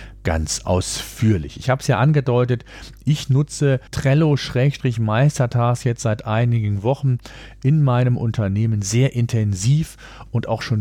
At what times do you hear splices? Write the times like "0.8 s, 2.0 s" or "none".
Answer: 3.9 s